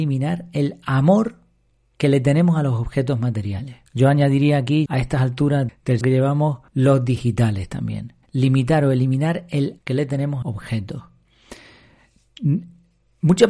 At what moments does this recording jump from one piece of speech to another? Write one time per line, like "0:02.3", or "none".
0:03.9
0:04.9
0:05.7
0:06.0
0:06.7
0:08.2
0:09.8
0:10.4

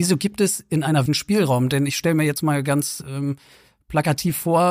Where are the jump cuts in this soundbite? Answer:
0:01.1

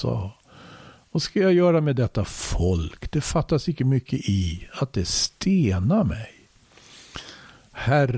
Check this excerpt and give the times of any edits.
none

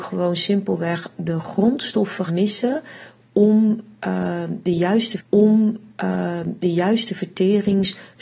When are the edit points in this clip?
0:02.3
0:05.2

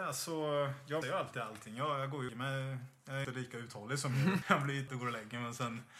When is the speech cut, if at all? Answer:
0:01.0
0:02.3
0:03.2
0:04.4
0:04.9

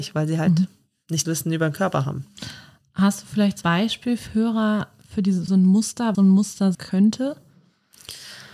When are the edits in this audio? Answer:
0:01.2
0:03.6
0:04.3
0:05.5
0:06.1
0:06.7

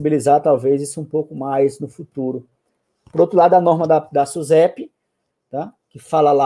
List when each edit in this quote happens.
none

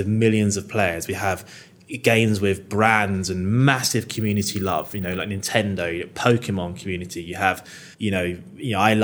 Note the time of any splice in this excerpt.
0:07.9

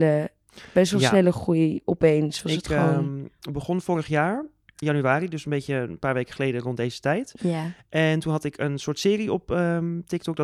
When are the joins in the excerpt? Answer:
0:04.8

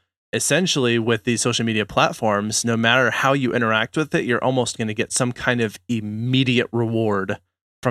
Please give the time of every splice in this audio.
0:04.8

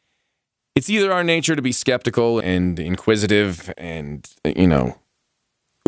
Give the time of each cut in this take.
0:02.4
0:03.7

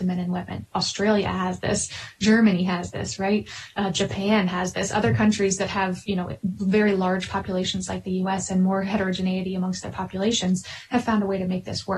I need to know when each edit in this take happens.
none

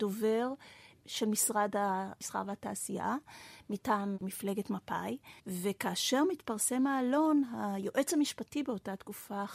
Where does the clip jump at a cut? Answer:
0:05.4

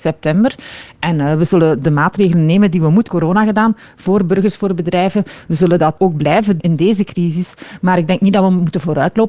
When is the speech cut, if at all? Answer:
0:03.1
0:06.0
0:06.6

